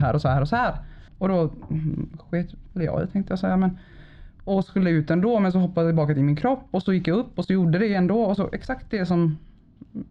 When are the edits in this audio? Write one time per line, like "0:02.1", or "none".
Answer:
0:01.1